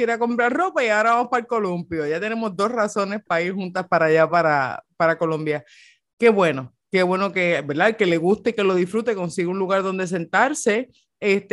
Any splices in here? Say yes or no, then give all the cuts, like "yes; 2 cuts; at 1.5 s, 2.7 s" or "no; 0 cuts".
no; 0 cuts